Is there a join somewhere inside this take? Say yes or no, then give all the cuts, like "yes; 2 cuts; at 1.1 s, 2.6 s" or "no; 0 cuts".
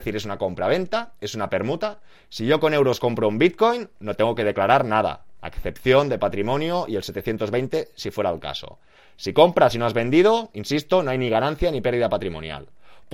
no; 0 cuts